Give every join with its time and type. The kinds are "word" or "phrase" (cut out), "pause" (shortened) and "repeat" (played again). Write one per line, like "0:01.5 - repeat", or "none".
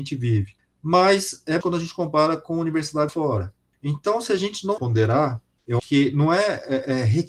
0:01.6 - word
0:03.1 - word
0:04.8 - word
0:05.8 - word